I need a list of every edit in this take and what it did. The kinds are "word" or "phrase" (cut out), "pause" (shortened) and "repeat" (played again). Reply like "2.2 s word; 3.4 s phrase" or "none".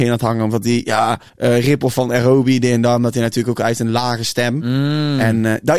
1.3 s pause